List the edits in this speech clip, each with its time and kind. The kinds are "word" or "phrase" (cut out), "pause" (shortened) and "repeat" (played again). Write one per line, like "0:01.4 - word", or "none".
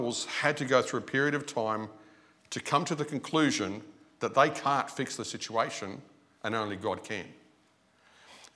none